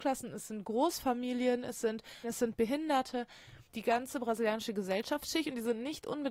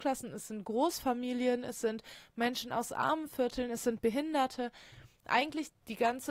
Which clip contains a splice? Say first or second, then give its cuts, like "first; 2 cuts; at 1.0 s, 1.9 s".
first; 2 cuts; at 2.2 s, 3.7 s